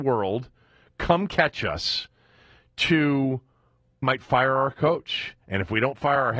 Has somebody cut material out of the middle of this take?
yes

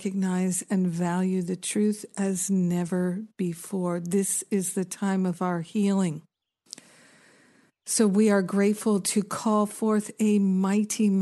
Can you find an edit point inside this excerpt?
no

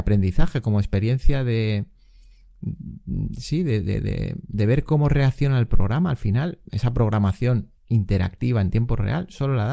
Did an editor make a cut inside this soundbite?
yes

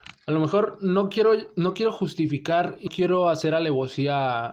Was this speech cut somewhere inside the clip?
yes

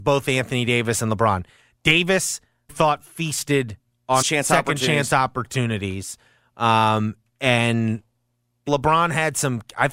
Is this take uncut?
no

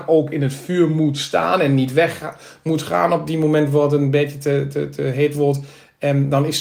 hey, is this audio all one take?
yes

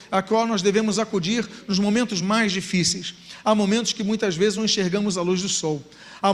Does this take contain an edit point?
no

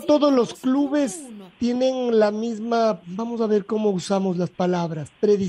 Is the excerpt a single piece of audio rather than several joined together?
yes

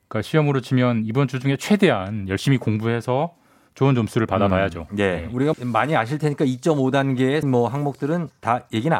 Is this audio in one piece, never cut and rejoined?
no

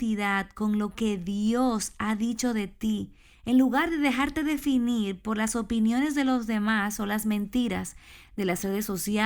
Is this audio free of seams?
yes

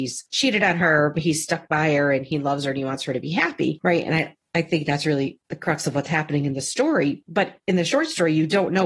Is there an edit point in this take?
no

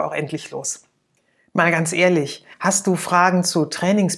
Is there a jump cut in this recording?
yes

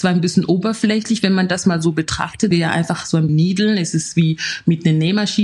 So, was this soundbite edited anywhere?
yes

